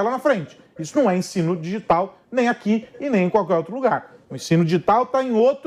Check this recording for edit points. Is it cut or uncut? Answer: uncut